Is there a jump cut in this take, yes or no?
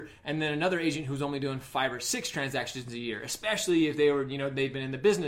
no